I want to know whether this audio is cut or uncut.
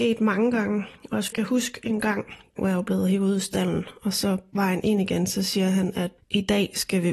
cut